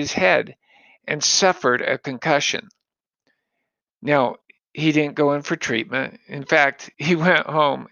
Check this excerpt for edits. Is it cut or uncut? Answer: uncut